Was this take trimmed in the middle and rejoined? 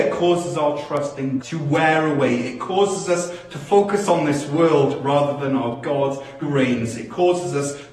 yes; 2 cuts; at 1.4 s, 6.4 s

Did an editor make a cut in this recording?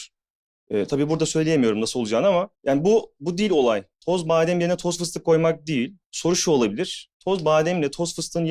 yes; 4 cuts; at 2.5 s, 3.9 s, 6.0 s, 7.1 s

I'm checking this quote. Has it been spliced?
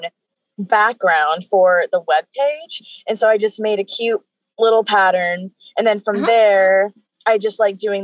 no; 0 cuts

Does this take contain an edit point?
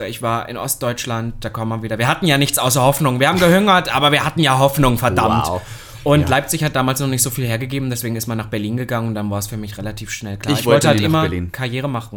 no; 0 cuts

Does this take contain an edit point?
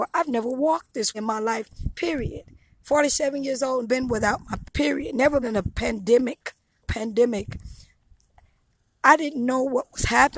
yes; 5 cuts; at 1.1 s, 3.8 s, 4.6 s, 5.4 s, 6.8 s

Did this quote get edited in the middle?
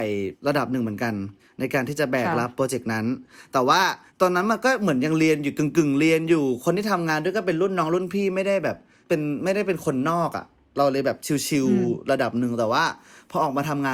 no; 0 cuts

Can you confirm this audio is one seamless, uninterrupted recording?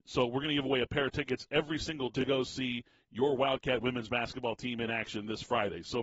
no; 1 cut; at 2.1 s

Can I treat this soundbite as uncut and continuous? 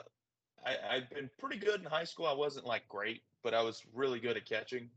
yes; 0 cuts

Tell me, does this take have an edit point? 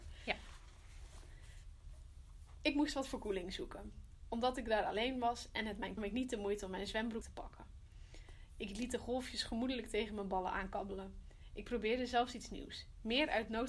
yes; 2 cuts; at 6.0 s, 7.2 s

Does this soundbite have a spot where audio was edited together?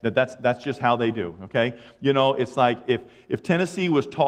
no; 0 cuts

